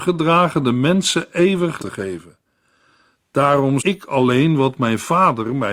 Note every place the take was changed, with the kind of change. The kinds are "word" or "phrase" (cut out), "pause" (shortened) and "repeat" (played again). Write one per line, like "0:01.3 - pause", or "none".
0:01.8 - word
0:03.8 - word